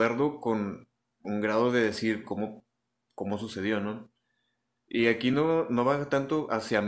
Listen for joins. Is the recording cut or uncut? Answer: uncut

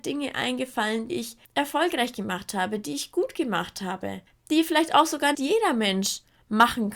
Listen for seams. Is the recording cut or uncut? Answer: cut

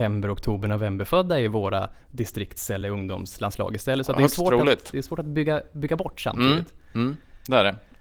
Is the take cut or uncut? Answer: uncut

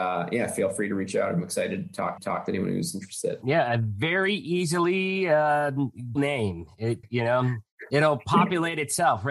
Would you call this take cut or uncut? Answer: cut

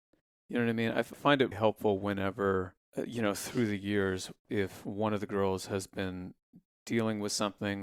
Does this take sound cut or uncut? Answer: cut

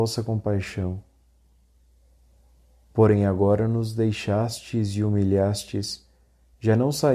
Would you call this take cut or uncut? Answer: uncut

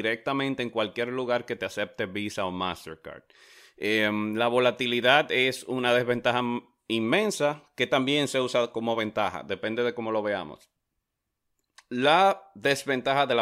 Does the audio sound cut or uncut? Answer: uncut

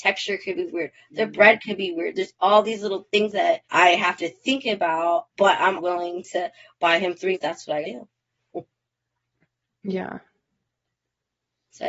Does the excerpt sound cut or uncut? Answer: cut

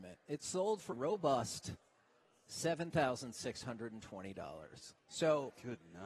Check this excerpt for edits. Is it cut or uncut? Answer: cut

